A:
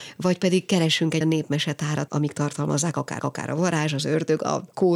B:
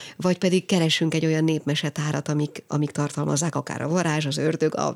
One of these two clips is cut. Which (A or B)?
A